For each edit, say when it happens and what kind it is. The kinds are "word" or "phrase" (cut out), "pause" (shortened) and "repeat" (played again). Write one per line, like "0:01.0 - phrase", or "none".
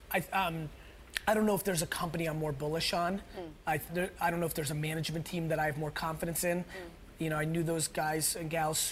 0:03.9 - word